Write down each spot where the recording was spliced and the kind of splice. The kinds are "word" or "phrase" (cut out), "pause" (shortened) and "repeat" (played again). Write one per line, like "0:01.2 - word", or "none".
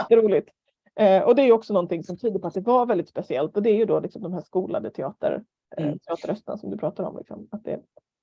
none

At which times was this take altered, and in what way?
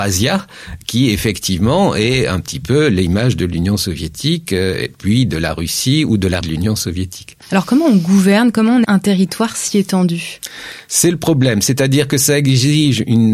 0:06.4 - phrase
0:07.4 - pause
0:08.8 - word

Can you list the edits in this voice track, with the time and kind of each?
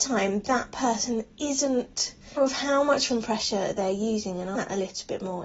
0:02.4 - word
0:03.1 - word
0:04.5 - word

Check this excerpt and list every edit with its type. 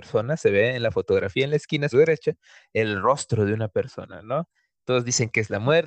0:01.9 - word

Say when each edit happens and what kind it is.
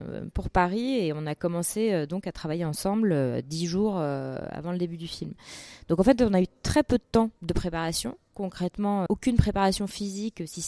0:07.4 - pause
0:09.1 - word

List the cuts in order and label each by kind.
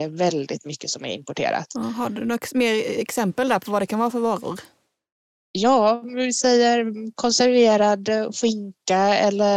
none

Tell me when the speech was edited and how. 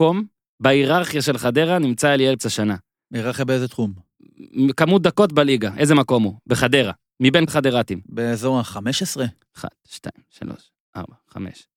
0:02.4 - word
0:07.5 - word

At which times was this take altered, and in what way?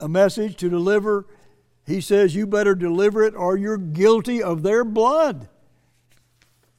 none

